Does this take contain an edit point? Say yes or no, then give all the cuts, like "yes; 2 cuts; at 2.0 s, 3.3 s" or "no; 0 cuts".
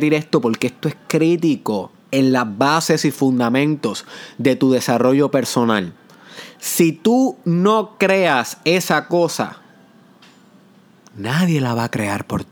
yes; 1 cut; at 2.0 s